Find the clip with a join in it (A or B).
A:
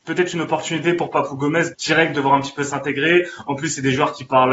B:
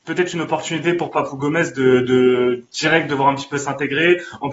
A